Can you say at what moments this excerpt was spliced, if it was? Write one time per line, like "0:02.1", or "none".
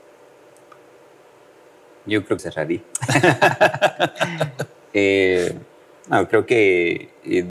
0:02.4